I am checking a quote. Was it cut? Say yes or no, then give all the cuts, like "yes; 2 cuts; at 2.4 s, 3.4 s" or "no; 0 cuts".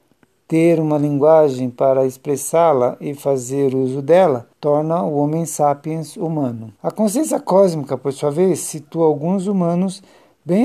yes; 2 cuts; at 4.5 s, 6.8 s